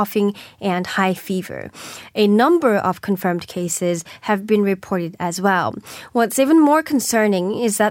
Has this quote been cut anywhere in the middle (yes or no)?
no